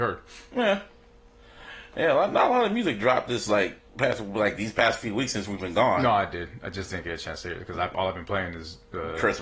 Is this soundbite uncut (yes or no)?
yes